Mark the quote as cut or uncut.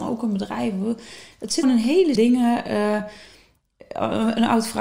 cut